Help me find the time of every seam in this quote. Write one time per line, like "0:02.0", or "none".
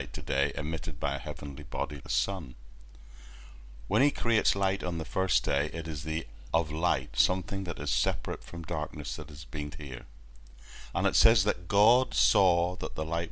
0:02.0
0:06.5
0:09.7

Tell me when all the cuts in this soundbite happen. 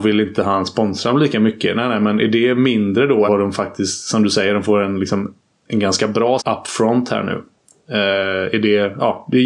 0:03.3
0:06.4

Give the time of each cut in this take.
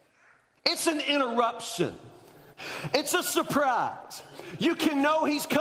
none

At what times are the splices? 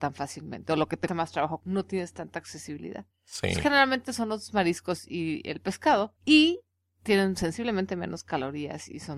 0:01.1
0:01.6
0:03.1
0:06.2

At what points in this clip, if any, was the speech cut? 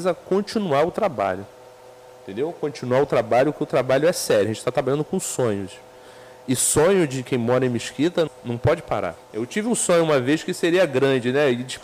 0:08.3
0:09.2

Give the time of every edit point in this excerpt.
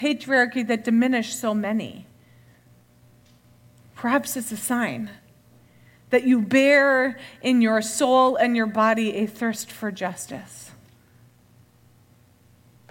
none

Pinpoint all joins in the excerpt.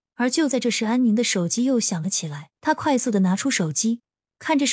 0:02.5

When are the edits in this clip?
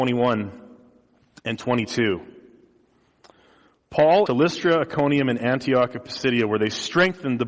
0:04.3

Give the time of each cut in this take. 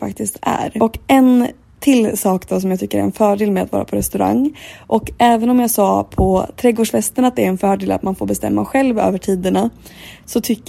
none

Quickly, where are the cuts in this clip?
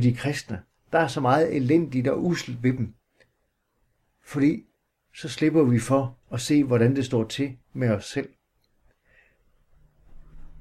0:06.2
0:07.6

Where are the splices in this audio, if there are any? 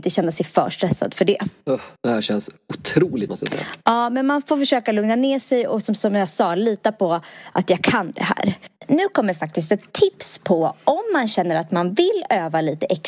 0:02.0
0:03.3
0:08.8

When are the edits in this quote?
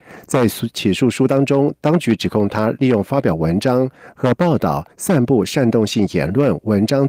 0:04.9

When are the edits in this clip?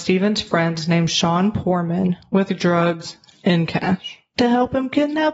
none

